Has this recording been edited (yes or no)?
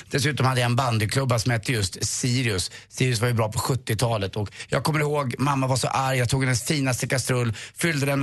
no